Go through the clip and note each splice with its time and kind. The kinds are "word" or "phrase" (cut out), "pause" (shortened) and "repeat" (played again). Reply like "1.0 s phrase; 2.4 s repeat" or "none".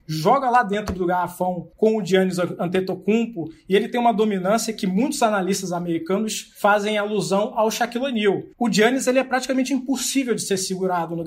1.7 s pause; 8.5 s pause